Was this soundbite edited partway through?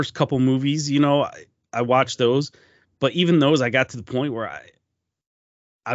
no; 0 cuts

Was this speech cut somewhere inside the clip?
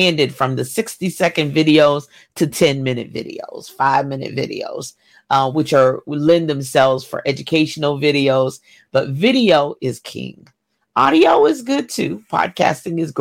no; 0 cuts

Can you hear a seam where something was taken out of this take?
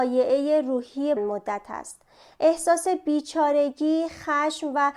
yes; 1 cut; at 1.2 s

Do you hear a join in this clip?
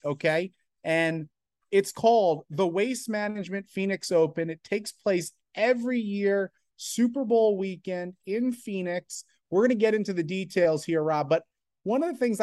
no; 0 cuts

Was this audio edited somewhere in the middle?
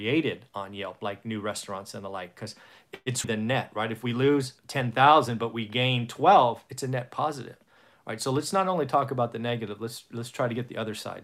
yes; 2 cuts; at 3.2 s, 4.6 s

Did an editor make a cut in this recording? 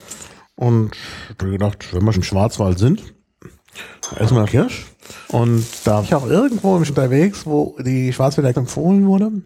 yes; 7 cuts; at 1.4 s, 2.1 s, 4.4 s, 5.3 s, 6.0 s, 6.9 s, 8.5 s

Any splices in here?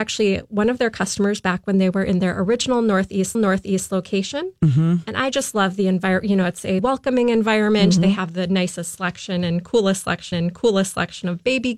yes; 3 cuts; at 3.3 s, 6.8 s, 10.3 s

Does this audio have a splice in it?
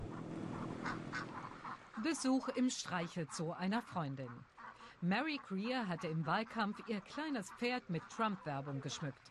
no; 0 cuts

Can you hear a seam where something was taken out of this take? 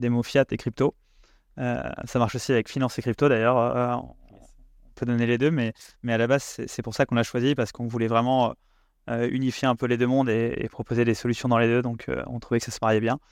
no; 0 cuts

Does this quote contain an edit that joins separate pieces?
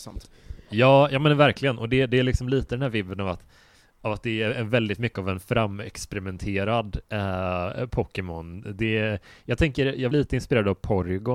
yes; 1 cut; at 10.1 s

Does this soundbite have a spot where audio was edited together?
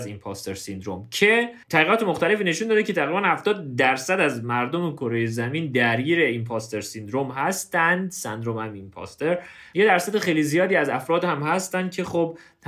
yes; 1 cut; at 1.6 s

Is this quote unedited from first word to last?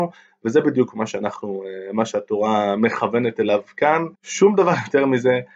no; 1 cut; at 4.1 s

